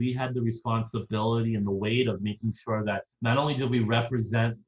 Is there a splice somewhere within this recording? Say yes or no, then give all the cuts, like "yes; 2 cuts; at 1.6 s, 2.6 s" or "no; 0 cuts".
yes; 1 cut; at 3.1 s